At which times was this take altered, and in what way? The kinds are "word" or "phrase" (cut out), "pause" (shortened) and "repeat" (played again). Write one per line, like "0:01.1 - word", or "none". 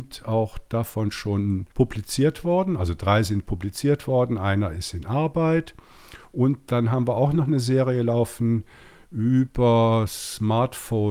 0:01.7 - pause